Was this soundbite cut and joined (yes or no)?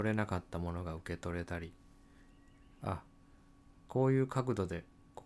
no